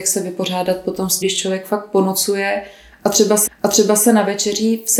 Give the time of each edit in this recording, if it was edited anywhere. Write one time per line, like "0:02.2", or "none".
0:01.2
0:03.5